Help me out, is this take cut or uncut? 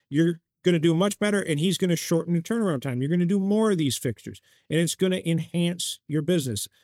uncut